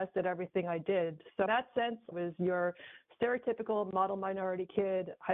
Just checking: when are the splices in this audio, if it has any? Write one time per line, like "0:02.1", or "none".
0:01.5
0:02.1